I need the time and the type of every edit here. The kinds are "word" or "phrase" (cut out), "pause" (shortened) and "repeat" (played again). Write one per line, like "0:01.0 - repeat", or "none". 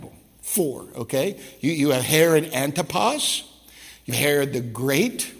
0:04.1 - word